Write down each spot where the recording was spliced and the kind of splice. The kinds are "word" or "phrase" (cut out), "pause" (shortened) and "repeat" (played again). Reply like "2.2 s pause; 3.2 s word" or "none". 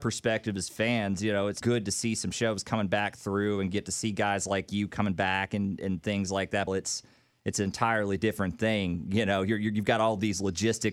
1.6 s word; 6.7 s phrase